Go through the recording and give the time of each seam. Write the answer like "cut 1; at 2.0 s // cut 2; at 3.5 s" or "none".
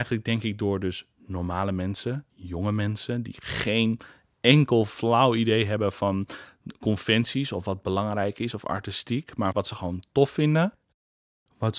cut 1; at 9.5 s